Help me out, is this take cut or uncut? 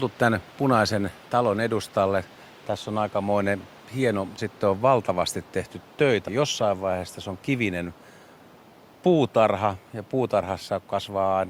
cut